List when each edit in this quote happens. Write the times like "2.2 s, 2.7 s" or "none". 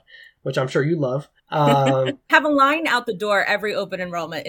1.4 s, 2.3 s